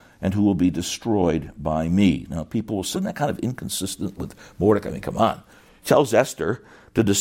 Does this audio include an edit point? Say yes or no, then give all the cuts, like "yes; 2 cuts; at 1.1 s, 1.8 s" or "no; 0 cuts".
yes; 2 cuts; at 2.9 s, 5.8 s